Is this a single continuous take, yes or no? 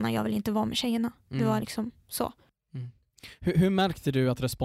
yes